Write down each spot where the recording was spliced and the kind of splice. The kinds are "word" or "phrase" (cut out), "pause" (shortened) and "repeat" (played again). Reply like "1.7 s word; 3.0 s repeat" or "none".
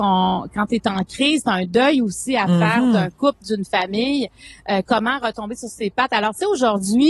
none